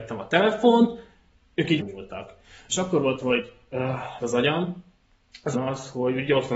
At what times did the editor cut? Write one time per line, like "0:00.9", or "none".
0:01.8
0:03.2
0:04.2
0:05.5